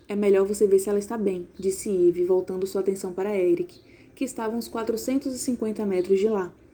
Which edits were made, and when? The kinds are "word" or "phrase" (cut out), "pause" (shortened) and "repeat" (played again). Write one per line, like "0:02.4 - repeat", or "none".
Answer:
none